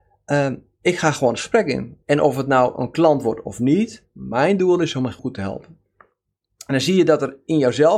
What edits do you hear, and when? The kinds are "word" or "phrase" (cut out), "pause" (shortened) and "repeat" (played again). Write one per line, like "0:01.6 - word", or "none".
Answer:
0:02.0 - pause
0:05.2 - word